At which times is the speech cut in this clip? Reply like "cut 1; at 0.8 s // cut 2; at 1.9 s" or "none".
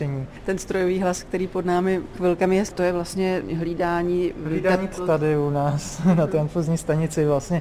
cut 1; at 2.1 s // cut 2; at 2.7 s // cut 3; at 4.9 s